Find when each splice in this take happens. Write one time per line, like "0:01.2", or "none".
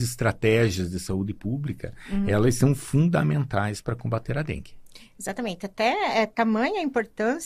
none